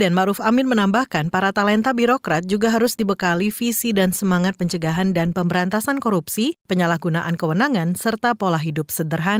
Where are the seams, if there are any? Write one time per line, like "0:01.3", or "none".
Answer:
0:06.6